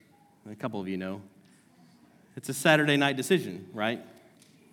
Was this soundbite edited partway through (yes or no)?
no